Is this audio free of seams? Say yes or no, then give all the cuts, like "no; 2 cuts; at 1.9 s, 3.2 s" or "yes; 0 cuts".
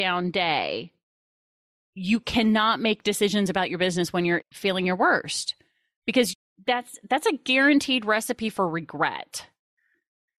yes; 0 cuts